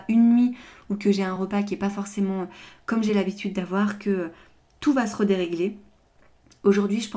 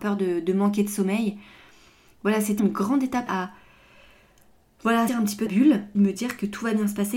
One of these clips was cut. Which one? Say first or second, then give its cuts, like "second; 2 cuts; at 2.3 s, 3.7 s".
second; 5 cuts; at 2.6 s, 3.3 s, 5.1 s, 5.5 s, 5.9 s